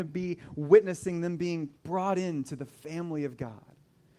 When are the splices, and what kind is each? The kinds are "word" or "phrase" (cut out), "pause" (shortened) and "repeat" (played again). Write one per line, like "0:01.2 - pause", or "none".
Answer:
0:01.8 - pause